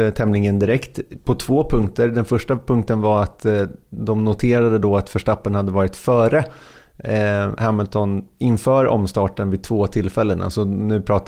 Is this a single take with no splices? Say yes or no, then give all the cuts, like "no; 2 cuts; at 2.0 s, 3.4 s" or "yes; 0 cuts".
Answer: yes; 0 cuts